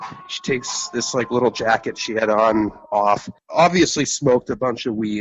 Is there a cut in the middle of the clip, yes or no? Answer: no